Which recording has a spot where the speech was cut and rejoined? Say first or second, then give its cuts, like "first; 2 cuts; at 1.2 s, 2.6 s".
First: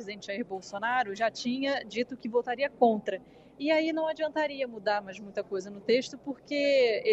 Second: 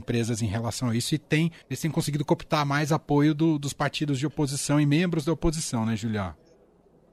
second; 1 cut; at 1.6 s